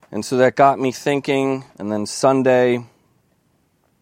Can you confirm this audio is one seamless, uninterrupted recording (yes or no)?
no